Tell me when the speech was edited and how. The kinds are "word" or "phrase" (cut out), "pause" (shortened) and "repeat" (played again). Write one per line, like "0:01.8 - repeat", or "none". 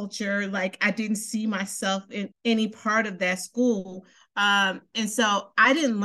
0:02.3 - word